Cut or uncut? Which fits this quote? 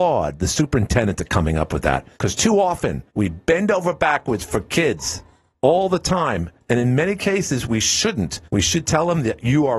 cut